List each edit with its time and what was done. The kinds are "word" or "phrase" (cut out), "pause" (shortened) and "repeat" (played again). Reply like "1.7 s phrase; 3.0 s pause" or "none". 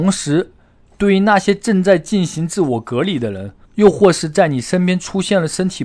3.6 s pause